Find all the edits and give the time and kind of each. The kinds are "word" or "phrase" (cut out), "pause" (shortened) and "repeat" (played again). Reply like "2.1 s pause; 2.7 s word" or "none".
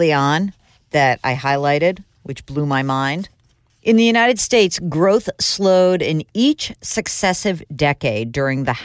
none